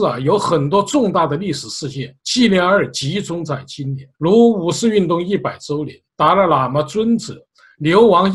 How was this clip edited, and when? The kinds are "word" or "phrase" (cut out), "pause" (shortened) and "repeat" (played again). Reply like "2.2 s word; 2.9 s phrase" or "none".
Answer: 2.2 s pause; 4.1 s pause; 6.1 s pause